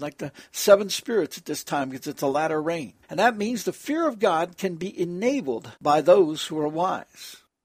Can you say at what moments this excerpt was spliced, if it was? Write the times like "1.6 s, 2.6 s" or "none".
3.0 s, 5.8 s